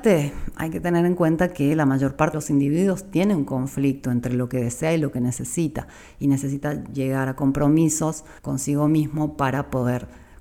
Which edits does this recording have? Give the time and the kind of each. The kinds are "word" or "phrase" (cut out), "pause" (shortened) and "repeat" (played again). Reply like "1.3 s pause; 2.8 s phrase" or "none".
2.3 s word; 8.4 s pause